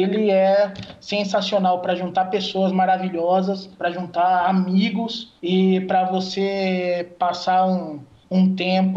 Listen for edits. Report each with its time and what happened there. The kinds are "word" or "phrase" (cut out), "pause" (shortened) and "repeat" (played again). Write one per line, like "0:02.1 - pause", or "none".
0:03.7 - pause
0:05.4 - pause